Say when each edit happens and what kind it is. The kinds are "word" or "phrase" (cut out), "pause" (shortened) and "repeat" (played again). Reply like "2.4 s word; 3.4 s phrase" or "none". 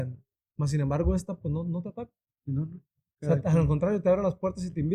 none